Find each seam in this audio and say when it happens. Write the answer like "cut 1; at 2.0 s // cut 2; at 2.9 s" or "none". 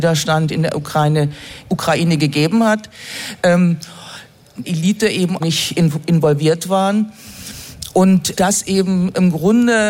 cut 1; at 1.7 s // cut 2; at 4.6 s // cut 3; at 5.4 s // cut 4; at 8.4 s